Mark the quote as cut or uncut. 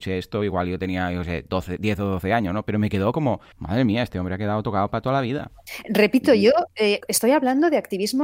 cut